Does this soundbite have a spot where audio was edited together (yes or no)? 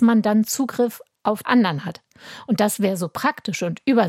yes